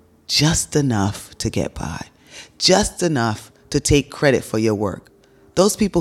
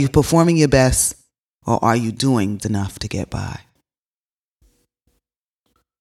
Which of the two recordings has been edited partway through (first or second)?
second